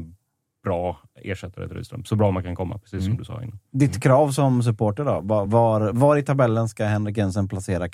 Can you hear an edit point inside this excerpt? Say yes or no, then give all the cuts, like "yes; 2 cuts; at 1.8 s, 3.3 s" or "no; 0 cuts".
no; 0 cuts